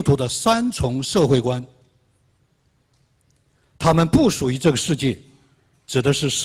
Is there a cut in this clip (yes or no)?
no